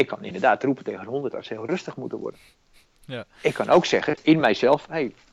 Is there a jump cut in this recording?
no; 0 cuts

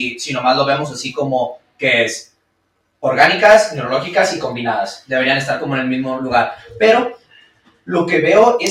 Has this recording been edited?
no; 0 cuts

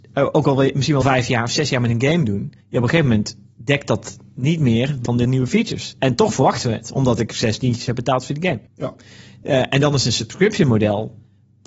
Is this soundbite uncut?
no; 4 cuts; at 1.0 s, 2.6 s, 5.1 s, 8.7 s

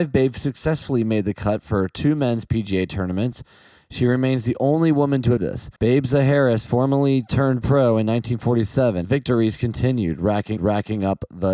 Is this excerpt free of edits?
no; 4 cuts; at 5.4 s, 5.8 s, 9.0 s, 10.6 s

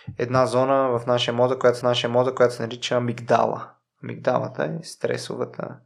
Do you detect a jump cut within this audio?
yes; 1 cut; at 1.8 s

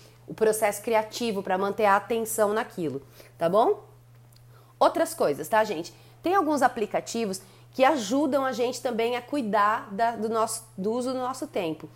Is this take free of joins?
yes; 0 cuts

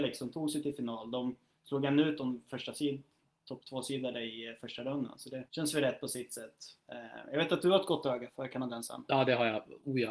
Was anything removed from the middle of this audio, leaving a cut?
yes; 2 cuts; at 5.5 s, 8.3 s

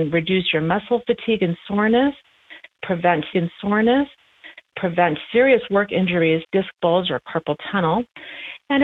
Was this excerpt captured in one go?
no; 2 cuts; at 3.3 s, 6.4 s

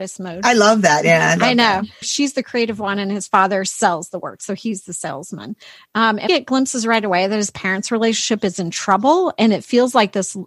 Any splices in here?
yes; 1 cut; at 6.3 s

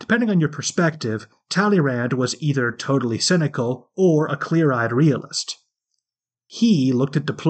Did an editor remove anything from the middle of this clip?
no; 0 cuts

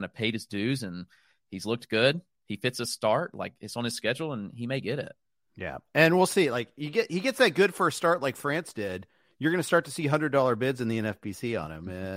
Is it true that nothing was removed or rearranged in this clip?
yes; 0 cuts

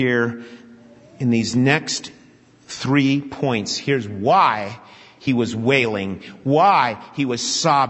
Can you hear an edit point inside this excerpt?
no; 0 cuts

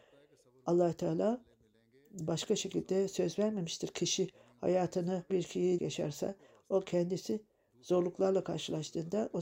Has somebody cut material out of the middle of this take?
yes; 2 cuts; at 5.3 s, 5.8 s

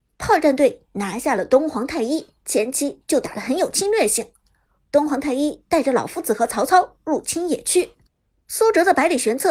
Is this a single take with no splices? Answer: no; 1 cut; at 2.4 s

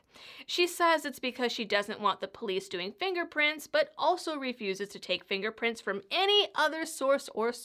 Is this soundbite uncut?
yes; 0 cuts

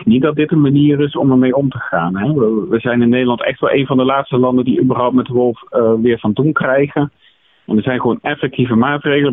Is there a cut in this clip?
no; 0 cuts

